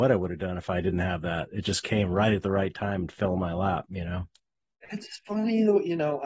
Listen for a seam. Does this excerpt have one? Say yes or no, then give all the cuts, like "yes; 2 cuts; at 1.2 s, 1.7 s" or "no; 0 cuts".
no; 0 cuts